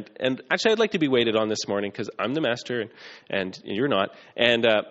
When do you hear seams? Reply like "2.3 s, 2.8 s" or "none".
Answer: none

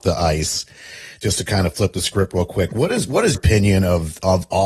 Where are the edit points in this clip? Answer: 3.3 s

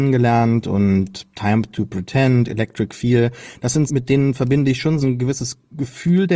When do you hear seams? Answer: 3.9 s, 5.0 s

